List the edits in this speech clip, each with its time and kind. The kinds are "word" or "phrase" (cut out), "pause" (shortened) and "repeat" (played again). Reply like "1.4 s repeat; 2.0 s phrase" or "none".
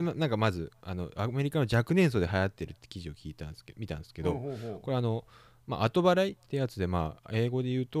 none